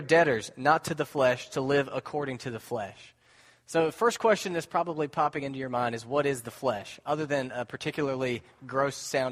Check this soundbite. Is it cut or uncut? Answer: uncut